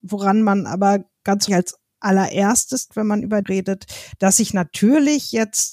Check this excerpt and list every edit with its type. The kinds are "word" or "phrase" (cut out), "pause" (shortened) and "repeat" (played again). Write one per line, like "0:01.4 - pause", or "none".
0:01.5 - word
0:02.9 - word
0:03.4 - word